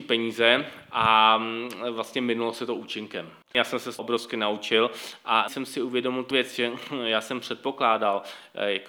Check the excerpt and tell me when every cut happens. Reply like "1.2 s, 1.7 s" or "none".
4.0 s, 5.5 s, 6.3 s